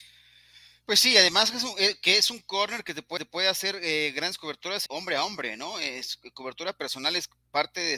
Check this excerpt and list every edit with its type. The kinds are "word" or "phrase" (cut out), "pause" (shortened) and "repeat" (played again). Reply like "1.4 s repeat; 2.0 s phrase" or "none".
3.2 s repeat; 4.9 s phrase